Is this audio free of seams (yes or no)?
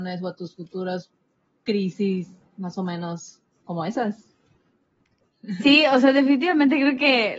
yes